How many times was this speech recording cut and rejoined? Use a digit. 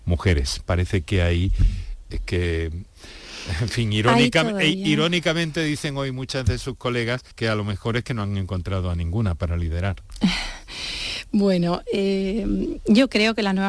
1